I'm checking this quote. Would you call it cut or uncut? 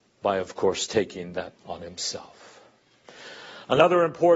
cut